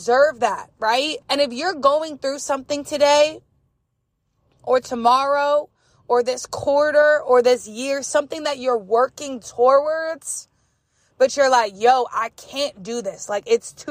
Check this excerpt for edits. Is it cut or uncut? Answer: cut